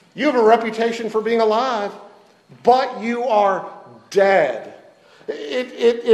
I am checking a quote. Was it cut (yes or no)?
no